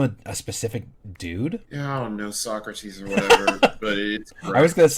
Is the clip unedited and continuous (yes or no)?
no